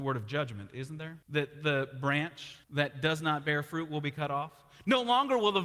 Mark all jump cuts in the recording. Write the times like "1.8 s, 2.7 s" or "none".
1.2 s, 2.6 s